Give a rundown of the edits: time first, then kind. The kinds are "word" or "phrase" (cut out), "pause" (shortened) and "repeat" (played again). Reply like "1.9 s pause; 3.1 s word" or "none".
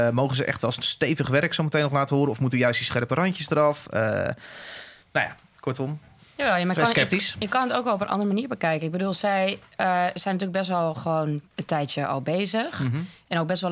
none

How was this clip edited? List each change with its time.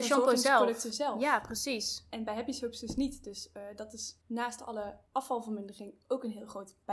4.2 s pause; 5.1 s pause

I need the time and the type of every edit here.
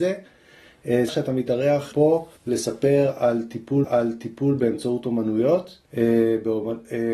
1.1 s word; 1.9 s word; 2.4 s pause; 3.8 s repeat; 5.8 s pause

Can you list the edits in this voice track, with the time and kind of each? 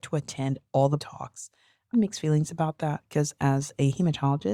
1.0 s word; 1.9 s word

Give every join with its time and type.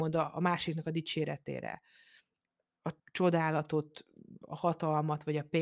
3.0 s pause

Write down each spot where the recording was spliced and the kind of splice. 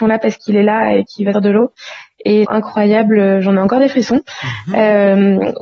1.3 s word; 2.4 s phrase

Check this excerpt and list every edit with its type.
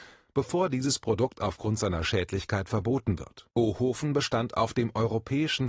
3.5 s pause

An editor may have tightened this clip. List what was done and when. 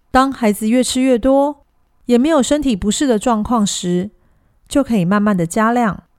none

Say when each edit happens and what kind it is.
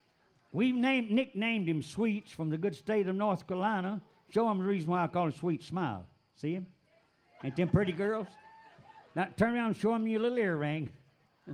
none

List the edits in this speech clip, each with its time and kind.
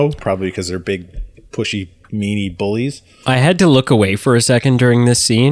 none

